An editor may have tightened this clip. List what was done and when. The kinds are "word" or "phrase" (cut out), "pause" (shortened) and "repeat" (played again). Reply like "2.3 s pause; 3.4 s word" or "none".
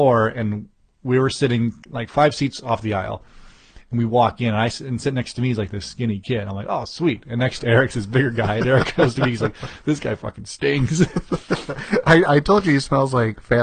none

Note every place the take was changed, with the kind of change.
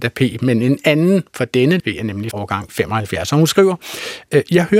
1.8 s word; 2.3 s word

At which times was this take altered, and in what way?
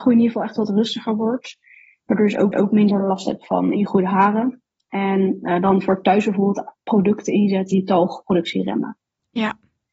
2.5 s repeat; 7.7 s word

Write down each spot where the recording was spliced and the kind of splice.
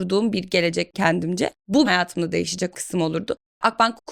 0.9 s word; 1.8 s word; 2.7 s word

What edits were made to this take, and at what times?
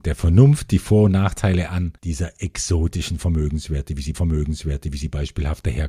2.0 s pause; 4.1 s repeat

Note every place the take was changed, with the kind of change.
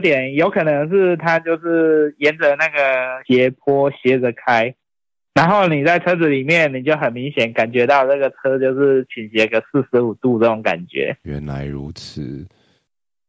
3.2 s pause

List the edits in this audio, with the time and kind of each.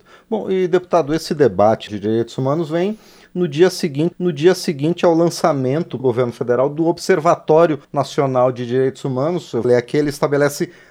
1.9 s phrase; 4.1 s repeat; 6.0 s word; 7.8 s pause; 9.6 s word

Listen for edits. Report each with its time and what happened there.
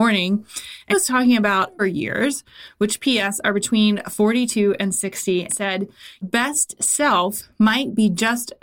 0.9 s word; 1.8 s word; 5.5 s word; 6.2 s word

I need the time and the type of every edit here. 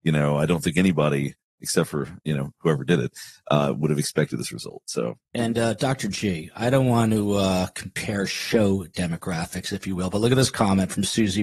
5.2 s pause

